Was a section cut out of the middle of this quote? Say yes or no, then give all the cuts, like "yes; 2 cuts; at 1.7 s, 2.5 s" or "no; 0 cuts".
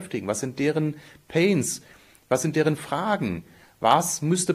no; 0 cuts